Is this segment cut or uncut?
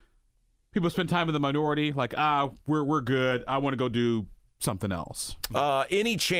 uncut